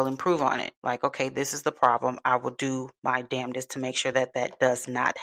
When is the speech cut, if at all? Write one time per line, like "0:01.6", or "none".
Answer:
none